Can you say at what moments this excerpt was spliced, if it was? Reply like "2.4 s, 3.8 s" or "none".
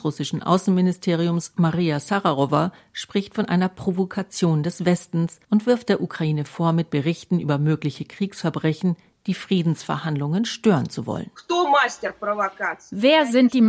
5.4 s